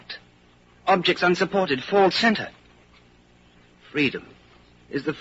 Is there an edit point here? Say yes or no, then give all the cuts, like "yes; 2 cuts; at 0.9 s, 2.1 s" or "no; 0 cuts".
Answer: yes; 1 cut; at 2.1 s